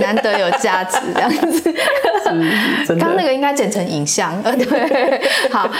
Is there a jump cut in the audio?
no; 0 cuts

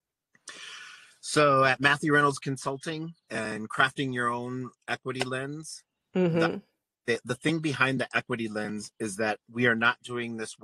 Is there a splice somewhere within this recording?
yes; 1 cut; at 3.2 s

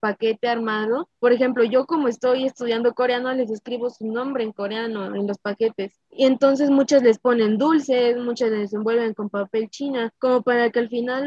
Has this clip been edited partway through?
yes; 3 cuts; at 1.1 s, 6.1 s, 10.2 s

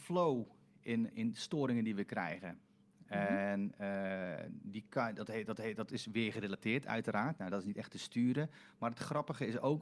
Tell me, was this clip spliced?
yes; 2 cuts; at 1.1 s, 5.6 s

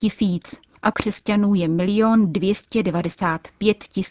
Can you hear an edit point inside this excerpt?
yes; 1 cut; at 0.9 s

